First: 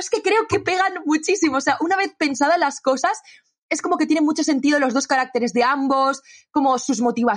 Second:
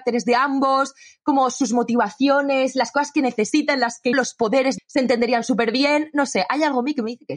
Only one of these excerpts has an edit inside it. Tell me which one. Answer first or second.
second